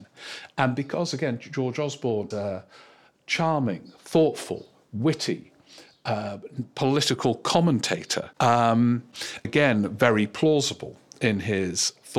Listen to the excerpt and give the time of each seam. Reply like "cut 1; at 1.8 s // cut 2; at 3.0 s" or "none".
cut 1; at 2.3 s // cut 2; at 8.3 s // cut 3; at 9.4 s